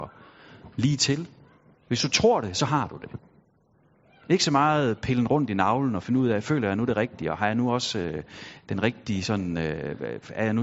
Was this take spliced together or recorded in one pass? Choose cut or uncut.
uncut